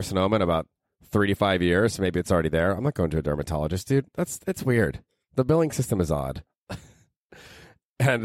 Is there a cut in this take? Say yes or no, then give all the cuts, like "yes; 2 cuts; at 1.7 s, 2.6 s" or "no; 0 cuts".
no; 0 cuts